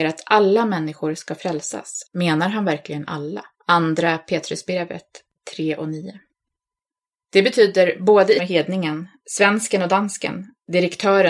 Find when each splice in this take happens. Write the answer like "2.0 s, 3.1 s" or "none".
2.1 s, 3.5 s, 8.4 s